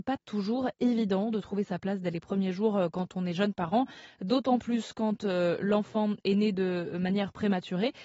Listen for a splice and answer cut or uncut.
uncut